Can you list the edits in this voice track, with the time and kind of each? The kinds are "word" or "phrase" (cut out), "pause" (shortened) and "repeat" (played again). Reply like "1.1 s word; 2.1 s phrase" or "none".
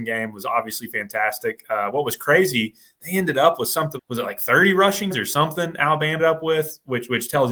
4.0 s word; 5.1 s word; 6.2 s word